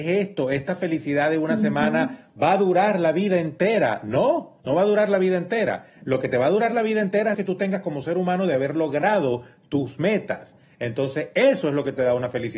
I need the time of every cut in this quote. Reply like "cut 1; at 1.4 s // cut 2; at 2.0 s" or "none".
cut 1; at 4.6 s // cut 2; at 7.3 s